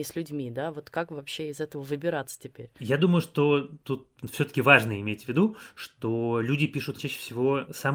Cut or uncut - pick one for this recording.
cut